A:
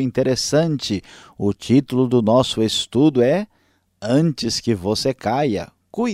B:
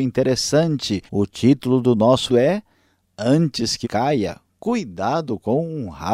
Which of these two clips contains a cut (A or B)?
B